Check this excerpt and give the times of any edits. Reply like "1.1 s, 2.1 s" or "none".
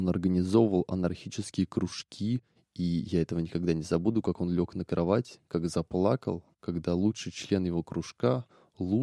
6.5 s